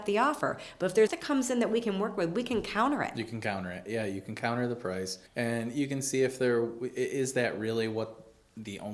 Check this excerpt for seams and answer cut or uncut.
cut